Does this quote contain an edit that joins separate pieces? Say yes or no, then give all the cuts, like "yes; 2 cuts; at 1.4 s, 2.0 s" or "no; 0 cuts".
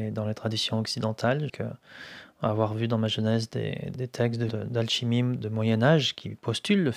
yes; 3 cuts; at 1.5 s, 3.9 s, 4.5 s